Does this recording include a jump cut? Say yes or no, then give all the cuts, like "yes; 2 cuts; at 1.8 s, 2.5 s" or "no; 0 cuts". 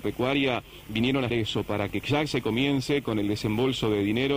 yes; 1 cut; at 1.3 s